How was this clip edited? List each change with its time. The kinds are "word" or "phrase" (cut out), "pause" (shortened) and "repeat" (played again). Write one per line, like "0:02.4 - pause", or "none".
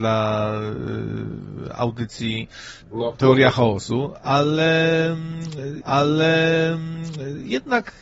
0:02.8 - pause
0:05.8 - repeat